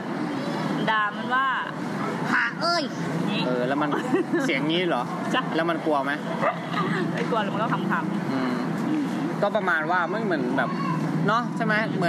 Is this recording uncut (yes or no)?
yes